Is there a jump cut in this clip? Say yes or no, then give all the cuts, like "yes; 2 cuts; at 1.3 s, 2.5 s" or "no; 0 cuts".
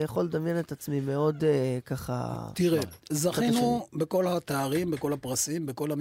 yes; 1 cut; at 3.0 s